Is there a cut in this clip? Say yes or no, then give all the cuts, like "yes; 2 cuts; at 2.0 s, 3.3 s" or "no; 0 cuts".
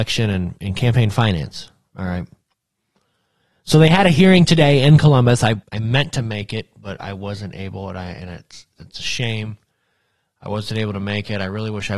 yes; 3 cuts; at 5.6 s, 7.0 s, 8.8 s